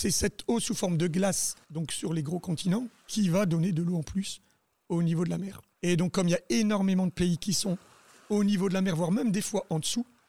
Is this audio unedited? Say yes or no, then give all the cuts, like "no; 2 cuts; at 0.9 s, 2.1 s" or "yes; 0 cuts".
no; 2 cuts; at 1.6 s, 5.7 s